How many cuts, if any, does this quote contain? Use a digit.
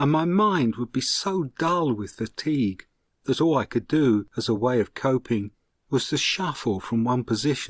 0